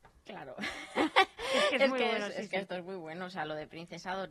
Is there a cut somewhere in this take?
no; 0 cuts

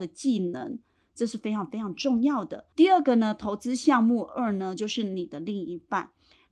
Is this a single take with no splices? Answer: no; 1 cut; at 2.7 s

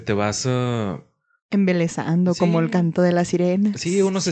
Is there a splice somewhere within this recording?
no; 0 cuts

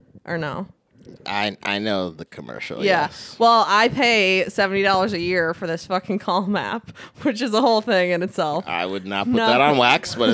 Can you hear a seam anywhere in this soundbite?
no; 0 cuts

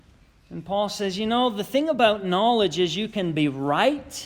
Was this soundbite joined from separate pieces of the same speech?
no; 0 cuts

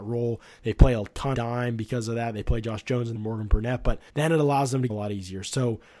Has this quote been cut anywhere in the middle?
yes; 4 cuts; at 1.3 s, 3.1 s, 4.1 s, 4.9 s

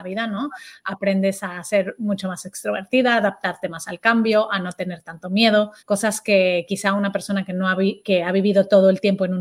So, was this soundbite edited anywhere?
yes; 1 cut; at 5.8 s

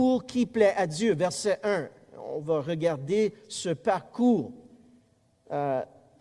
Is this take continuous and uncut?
yes; 0 cuts

